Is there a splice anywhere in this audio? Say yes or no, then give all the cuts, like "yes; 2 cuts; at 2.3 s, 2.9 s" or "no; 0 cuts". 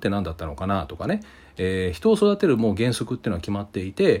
no; 0 cuts